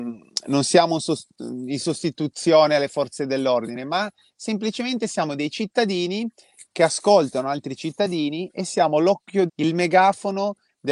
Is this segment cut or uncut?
cut